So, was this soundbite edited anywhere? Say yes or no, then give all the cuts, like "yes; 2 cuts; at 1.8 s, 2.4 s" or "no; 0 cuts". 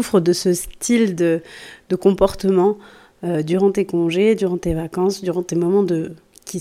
no; 0 cuts